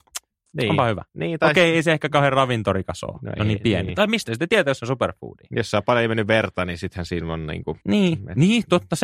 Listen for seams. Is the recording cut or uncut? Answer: cut